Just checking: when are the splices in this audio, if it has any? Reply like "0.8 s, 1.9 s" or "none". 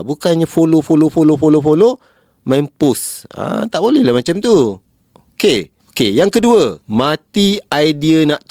5.8 s, 6.8 s